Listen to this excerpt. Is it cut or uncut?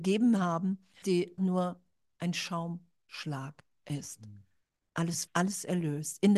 cut